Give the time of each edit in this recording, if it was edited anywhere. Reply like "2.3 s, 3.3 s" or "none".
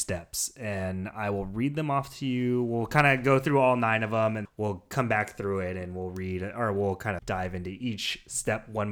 4.4 s, 7.2 s